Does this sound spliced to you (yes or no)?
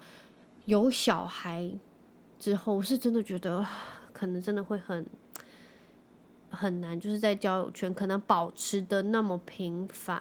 no